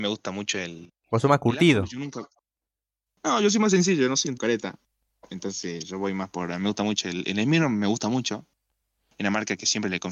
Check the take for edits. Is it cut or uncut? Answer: cut